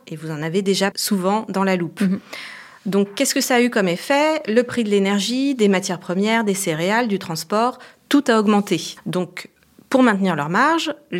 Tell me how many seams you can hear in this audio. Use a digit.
1